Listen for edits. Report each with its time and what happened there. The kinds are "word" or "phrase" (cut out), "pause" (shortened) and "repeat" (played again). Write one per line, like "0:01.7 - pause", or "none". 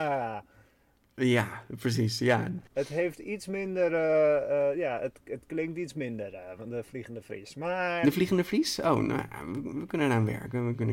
none